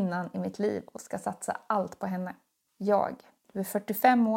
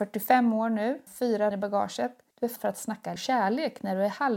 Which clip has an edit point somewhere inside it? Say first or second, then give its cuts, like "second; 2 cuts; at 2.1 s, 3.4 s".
second; 4 cuts; at 1.1 s, 1.5 s, 2.6 s, 3.2 s